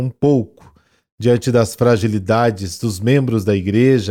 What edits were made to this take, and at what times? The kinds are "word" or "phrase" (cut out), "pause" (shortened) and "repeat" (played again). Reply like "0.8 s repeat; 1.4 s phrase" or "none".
none